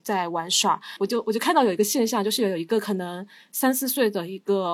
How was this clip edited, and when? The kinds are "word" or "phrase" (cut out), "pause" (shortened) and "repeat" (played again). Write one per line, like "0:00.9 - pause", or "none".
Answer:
none